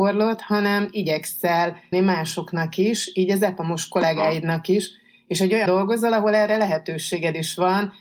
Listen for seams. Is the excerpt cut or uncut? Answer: cut